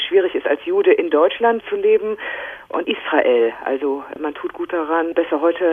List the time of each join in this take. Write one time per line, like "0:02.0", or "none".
0:01.6
0:02.8